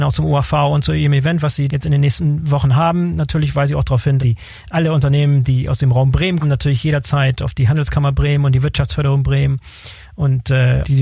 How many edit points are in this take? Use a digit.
2